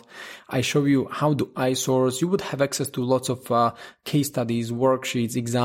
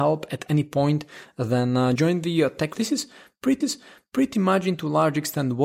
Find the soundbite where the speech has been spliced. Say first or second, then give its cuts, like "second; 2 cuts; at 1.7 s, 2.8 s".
second; 3 cuts; at 2.0 s, 2.8 s, 3.6 s